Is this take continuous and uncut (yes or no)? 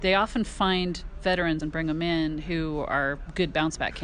no